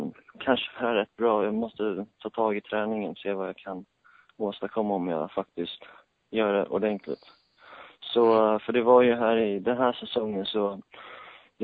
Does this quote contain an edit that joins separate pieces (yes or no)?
no